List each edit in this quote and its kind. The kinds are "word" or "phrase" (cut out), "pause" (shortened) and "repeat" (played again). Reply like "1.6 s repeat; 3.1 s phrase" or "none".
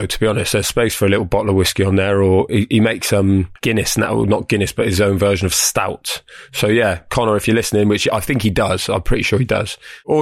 3.6 s pause